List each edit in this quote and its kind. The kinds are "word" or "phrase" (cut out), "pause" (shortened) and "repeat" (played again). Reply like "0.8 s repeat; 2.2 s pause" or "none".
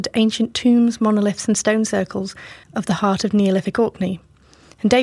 2.6 s pause

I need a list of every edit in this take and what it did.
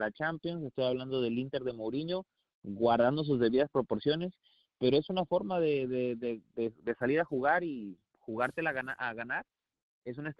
8.1 s pause

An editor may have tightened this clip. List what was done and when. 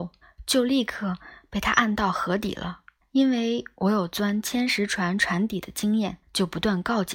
3.0 s pause; 6.2 s pause

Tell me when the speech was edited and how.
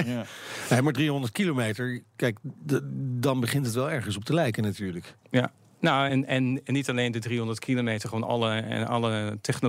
none

